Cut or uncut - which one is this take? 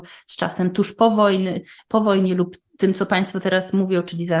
uncut